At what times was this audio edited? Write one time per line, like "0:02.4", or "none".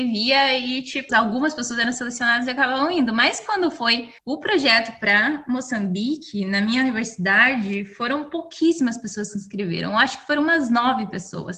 0:01.1
0:04.2